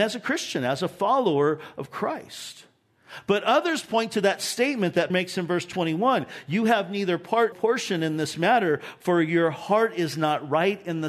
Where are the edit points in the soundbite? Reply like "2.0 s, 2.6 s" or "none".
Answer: 5.1 s, 7.5 s